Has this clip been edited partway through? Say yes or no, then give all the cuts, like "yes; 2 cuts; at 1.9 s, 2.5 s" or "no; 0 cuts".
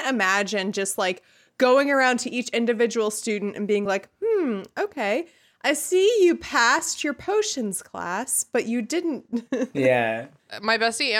no; 0 cuts